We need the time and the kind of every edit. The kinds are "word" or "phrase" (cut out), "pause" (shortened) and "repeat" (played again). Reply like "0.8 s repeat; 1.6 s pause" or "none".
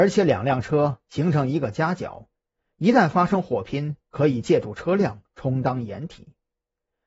none